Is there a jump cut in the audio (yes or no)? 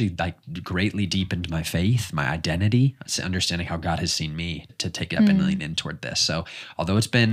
yes